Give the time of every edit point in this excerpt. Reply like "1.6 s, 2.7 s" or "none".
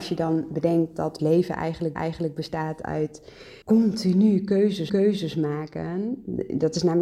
1.2 s, 2.0 s, 3.6 s, 4.9 s

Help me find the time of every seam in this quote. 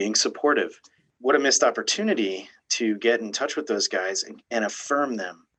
none

